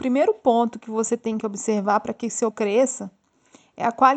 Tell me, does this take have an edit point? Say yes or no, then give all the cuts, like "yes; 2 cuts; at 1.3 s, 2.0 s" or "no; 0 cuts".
yes; 1 cut; at 2.5 s